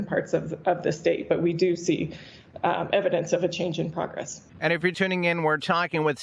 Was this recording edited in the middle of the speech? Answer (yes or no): yes